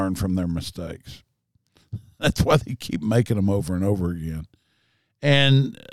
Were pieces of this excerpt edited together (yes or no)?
no